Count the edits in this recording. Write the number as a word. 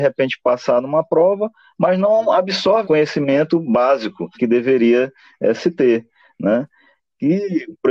two